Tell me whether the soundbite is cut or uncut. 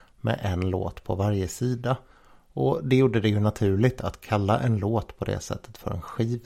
uncut